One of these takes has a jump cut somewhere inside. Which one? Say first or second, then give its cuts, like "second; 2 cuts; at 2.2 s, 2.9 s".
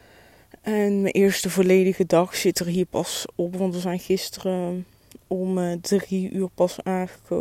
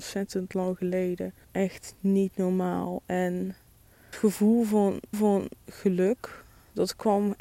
second; 3 cuts; at 1.4 s, 4.1 s, 5.1 s